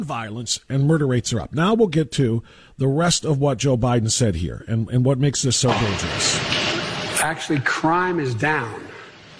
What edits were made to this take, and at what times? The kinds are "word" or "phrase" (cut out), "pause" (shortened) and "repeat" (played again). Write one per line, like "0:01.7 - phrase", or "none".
none